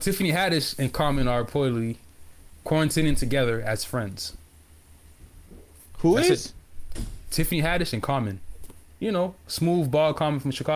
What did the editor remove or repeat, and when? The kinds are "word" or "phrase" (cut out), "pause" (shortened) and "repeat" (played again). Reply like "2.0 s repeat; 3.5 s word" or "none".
none